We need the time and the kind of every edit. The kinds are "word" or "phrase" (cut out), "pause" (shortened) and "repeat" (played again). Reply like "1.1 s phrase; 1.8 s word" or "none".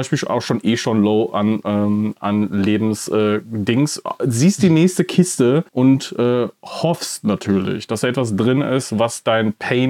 5.7 s pause